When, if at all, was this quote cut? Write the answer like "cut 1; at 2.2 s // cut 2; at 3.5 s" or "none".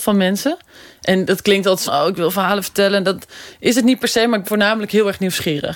cut 1; at 1.9 s // cut 2; at 4.4 s